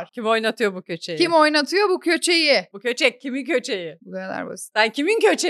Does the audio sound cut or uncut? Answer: uncut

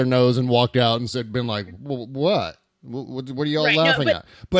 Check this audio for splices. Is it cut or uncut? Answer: uncut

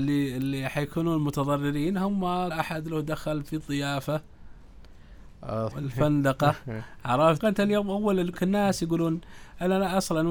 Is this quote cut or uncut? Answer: cut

